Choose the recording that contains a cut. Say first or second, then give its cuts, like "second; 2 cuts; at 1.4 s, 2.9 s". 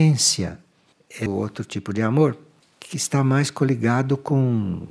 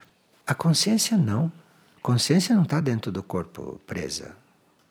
first; 1 cut; at 1.3 s